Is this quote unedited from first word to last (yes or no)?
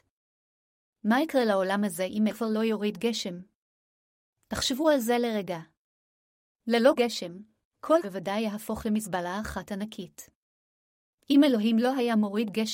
no